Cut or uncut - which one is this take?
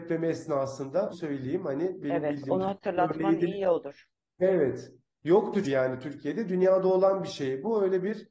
cut